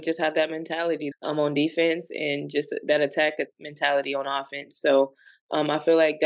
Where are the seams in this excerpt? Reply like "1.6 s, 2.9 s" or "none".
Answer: 1.1 s